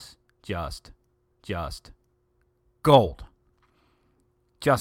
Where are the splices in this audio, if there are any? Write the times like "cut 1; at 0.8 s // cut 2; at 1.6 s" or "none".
cut 1; at 1.3 s